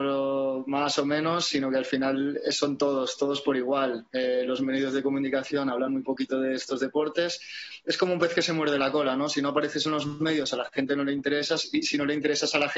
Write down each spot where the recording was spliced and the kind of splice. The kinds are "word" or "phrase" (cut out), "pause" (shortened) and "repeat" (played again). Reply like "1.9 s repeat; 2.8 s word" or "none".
none